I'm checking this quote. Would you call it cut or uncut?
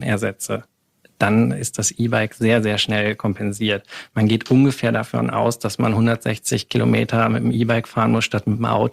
uncut